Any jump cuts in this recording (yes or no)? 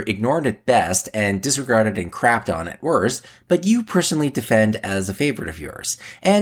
no